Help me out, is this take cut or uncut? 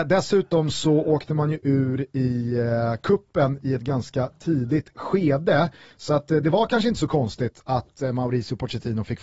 uncut